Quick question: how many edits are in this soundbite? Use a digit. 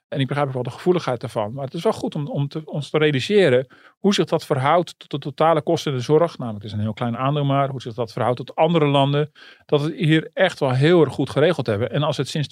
0